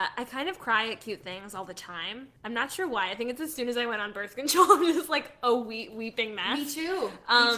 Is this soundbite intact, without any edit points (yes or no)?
no